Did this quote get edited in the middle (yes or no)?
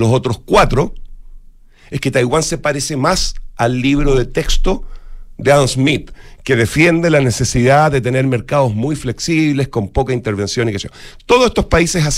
no